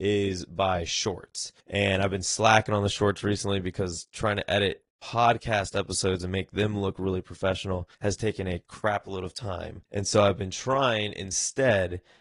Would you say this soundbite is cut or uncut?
cut